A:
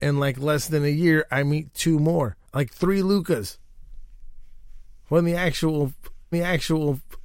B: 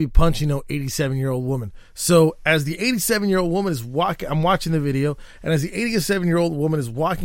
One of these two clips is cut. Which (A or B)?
A